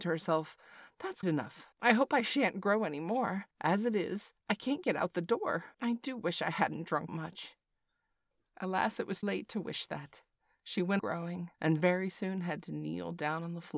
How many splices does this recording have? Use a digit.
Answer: 8